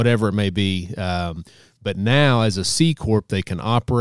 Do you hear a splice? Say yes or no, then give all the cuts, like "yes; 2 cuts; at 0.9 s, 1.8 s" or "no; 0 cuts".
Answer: no; 0 cuts